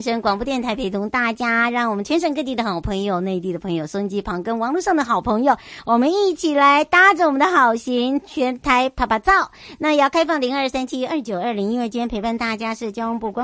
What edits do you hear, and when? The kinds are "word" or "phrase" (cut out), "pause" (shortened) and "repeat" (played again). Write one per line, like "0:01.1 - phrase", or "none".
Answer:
none

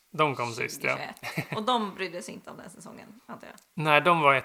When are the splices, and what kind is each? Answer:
none

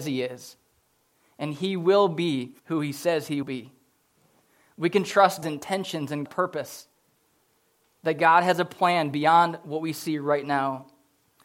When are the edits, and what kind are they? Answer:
0:02.6 - pause
0:03.4 - word
0:05.4 - word
0:06.3 - word

